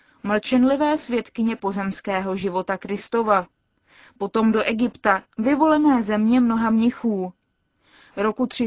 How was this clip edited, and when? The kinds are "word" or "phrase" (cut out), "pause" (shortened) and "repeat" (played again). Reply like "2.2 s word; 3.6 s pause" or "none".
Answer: none